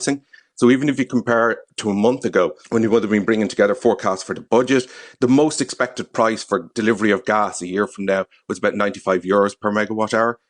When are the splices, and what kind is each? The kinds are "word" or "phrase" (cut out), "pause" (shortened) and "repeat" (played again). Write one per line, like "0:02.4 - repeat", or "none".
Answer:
0:02.6 - pause